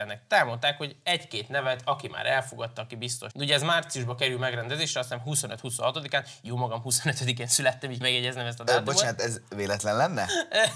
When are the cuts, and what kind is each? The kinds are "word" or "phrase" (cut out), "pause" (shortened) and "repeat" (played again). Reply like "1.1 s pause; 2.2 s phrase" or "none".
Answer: 3.3 s word; 8.0 s phrase